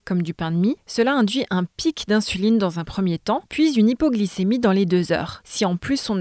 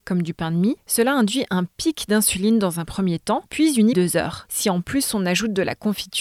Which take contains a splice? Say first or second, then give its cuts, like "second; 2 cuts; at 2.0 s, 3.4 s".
second; 1 cut; at 3.9 s